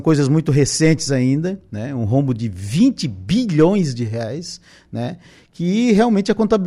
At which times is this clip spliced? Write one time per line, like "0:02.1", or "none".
none